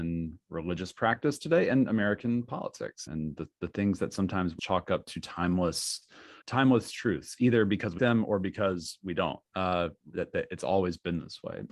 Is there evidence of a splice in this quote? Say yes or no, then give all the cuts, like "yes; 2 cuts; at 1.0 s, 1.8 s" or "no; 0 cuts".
yes; 4 cuts; at 3.1 s, 4.6 s, 6.4 s, 8.0 s